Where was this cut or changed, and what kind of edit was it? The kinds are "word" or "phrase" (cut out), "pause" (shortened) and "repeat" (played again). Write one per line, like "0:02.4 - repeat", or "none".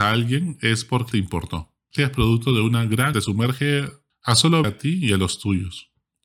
0:01.1 - word
0:02.0 - word
0:03.1 - phrase
0:04.6 - word